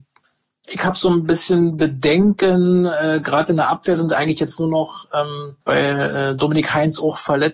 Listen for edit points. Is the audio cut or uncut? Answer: cut